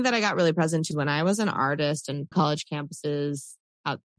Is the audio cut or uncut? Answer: cut